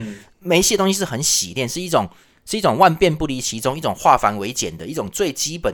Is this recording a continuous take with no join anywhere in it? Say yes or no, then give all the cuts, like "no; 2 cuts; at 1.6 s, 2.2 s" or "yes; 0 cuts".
yes; 0 cuts